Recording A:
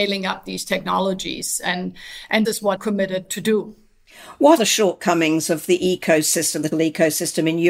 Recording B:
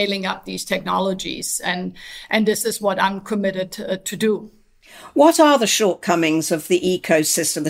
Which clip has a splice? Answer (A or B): A